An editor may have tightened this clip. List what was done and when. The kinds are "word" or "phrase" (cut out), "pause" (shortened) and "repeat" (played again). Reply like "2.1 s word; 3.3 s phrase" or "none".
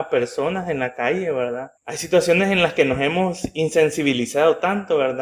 1.8 s pause